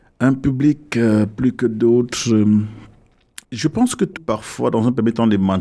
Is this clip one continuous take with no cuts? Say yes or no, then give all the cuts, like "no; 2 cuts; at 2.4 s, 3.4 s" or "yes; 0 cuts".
no; 2 cuts; at 3.4 s, 4.2 s